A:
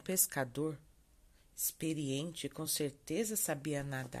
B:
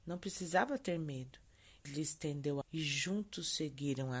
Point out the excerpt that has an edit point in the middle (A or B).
B